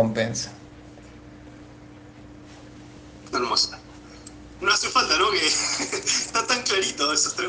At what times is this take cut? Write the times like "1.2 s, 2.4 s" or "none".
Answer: none